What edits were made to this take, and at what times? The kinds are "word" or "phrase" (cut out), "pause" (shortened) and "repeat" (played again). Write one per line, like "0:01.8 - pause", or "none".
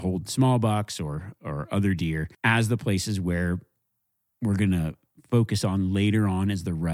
0:02.3 - pause

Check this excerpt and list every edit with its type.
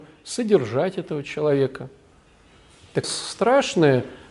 0:03.0 - phrase

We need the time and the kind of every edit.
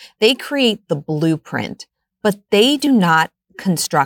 none

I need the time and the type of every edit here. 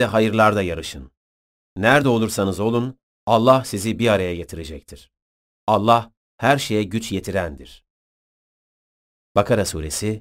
none

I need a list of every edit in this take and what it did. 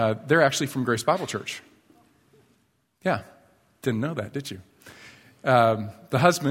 none

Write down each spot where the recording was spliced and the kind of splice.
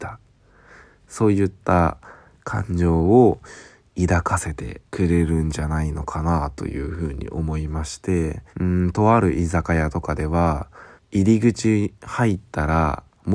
0:04.9 - pause
0:08.5 - pause
0:11.0 - pause

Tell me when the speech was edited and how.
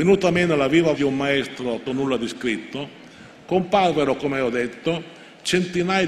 0:00.9 - word
0:01.9 - phrase

